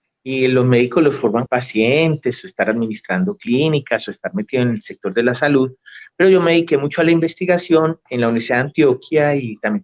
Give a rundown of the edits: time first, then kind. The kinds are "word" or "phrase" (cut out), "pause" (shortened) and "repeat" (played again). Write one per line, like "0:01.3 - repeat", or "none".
0:01.5 - phrase
0:08.1 - pause